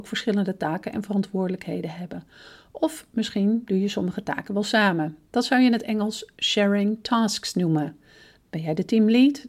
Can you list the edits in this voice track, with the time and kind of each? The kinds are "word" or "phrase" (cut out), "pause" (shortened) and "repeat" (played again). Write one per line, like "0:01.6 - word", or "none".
none